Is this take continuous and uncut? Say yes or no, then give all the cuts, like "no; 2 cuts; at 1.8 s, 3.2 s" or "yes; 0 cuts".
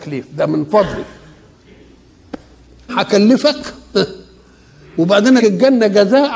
no; 2 cuts; at 2.9 s, 5.4 s